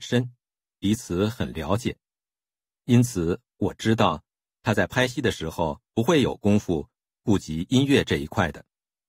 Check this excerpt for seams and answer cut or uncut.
cut